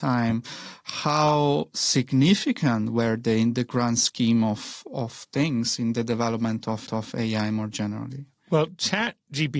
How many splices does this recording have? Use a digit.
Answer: 1